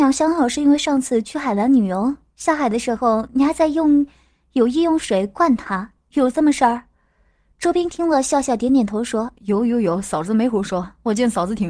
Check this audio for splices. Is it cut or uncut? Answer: uncut